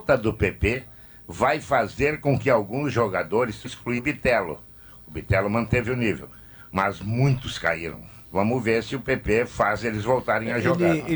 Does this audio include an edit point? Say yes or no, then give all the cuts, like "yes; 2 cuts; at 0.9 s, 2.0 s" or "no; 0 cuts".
yes; 3 cuts; at 3.6 s, 4.0 s, 8.2 s